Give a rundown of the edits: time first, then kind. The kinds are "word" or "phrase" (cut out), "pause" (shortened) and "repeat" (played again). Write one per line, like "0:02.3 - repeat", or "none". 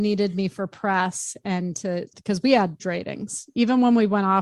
0:02.1 - phrase
0:02.8 - word